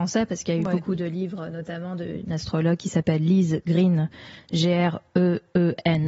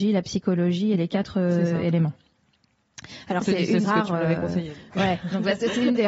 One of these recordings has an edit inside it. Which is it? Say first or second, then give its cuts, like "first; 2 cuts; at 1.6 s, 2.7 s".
second; 2 cuts; at 3.4 s, 3.8 s